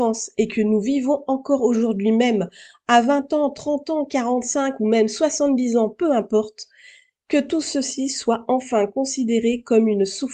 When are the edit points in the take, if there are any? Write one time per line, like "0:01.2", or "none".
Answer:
none